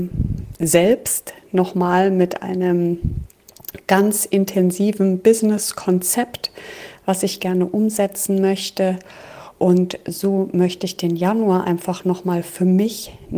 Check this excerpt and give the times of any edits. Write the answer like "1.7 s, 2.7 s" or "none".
none